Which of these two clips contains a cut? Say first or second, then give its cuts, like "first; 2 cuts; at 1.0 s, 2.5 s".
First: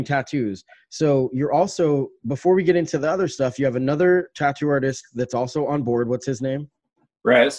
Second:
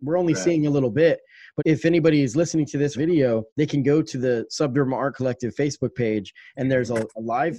second; 3 cuts; at 1.6 s, 2.9 s, 3.5 s